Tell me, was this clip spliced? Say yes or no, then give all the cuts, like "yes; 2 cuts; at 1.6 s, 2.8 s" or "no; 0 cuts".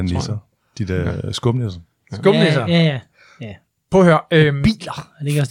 no; 0 cuts